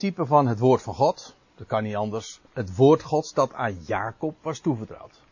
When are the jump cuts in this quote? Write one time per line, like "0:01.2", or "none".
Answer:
0:02.5